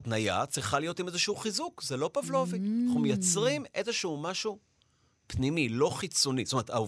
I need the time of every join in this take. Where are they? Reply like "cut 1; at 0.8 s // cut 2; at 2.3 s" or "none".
none

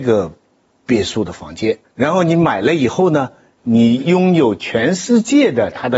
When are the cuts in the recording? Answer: cut 1; at 1.8 s

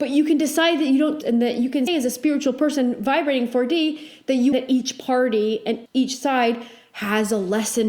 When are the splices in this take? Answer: cut 1; at 1.2 s // cut 2; at 1.9 s // cut 3; at 4.5 s // cut 4; at 5.9 s

